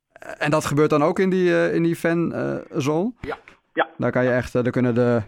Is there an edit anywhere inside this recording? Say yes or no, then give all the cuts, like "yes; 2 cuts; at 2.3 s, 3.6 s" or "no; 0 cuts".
no; 0 cuts